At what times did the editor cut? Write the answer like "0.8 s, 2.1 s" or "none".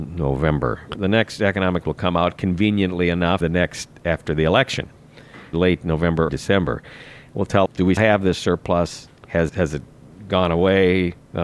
1.0 s, 1.8 s, 3.4 s, 5.5 s, 6.3 s, 7.7 s, 8.0 s, 9.5 s